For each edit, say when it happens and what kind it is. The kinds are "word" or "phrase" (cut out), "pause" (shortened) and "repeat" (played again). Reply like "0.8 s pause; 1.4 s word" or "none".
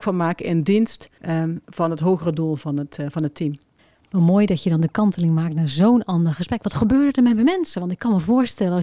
1.2 s pause; 3.8 s pause